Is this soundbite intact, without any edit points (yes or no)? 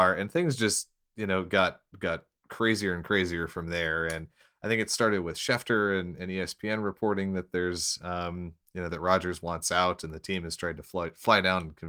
yes